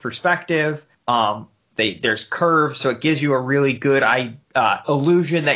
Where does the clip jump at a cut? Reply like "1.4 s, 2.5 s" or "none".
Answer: 0.9 s, 4.4 s